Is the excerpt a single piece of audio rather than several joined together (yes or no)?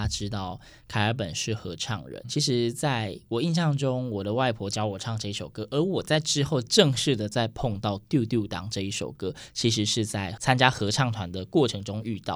no